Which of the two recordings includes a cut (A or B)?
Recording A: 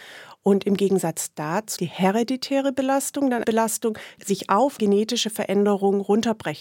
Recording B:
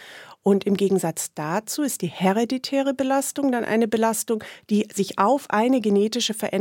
A